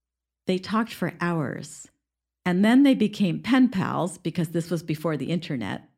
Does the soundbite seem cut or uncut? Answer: uncut